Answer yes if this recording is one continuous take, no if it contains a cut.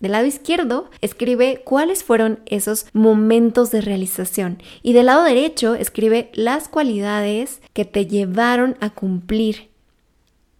no